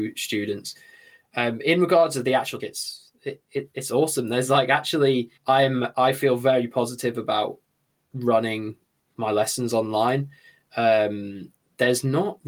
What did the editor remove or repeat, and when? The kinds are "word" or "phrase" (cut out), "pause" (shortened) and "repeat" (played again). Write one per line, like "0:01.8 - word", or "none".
0:02.6 - phrase
0:05.4 - pause
0:09.0 - pause